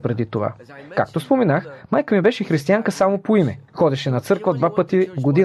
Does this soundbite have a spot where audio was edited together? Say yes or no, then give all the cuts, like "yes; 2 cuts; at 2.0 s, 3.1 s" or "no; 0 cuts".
yes; 1 cut; at 3.7 s